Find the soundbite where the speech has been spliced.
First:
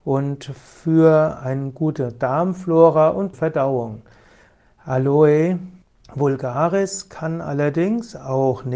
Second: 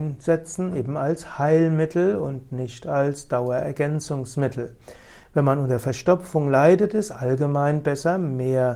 first; 2 cuts; at 3.3 s, 5.8 s

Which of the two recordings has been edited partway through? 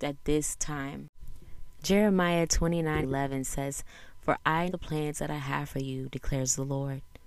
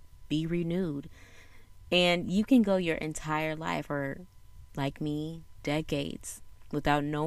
first; 2 cuts; at 3.0 s, 4.7 s

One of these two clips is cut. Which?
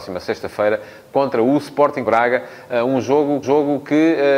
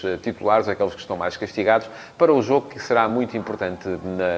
first; 2 cuts; at 2.0 s, 3.4 s

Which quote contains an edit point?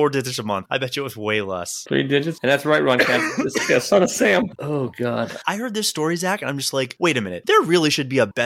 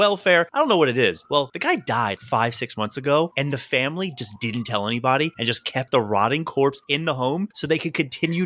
second; 1 cut; at 2.2 s

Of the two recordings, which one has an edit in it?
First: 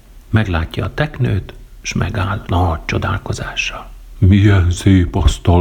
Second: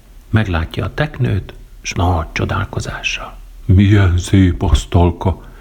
second; 1 cut; at 1.9 s

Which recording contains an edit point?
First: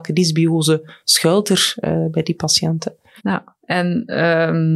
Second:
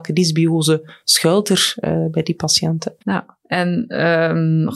second; 1 cut; at 3.0 s

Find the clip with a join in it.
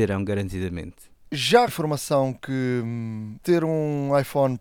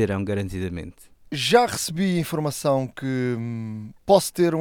first; 2 cuts; at 1.7 s, 3.4 s

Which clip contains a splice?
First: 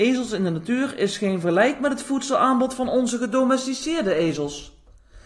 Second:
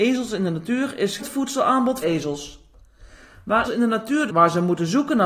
second; 4 cuts; at 1.2 s, 2.0 s, 3.6 s, 4.3 s

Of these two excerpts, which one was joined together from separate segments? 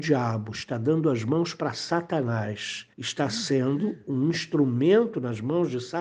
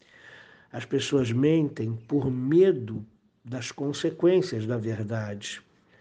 first; 1 cut; at 2.9 s

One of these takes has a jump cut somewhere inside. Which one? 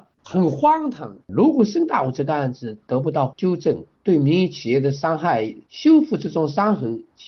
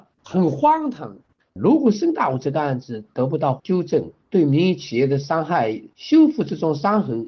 first; 1 cut; at 1.2 s

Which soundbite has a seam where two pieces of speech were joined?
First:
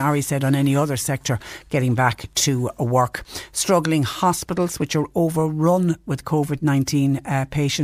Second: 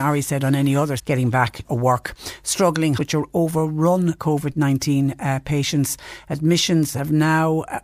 second; 4 cuts; at 1.0 s, 1.6 s, 3.0 s, 4.2 s

